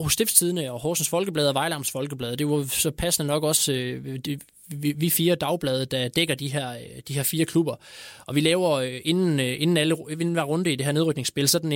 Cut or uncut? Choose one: uncut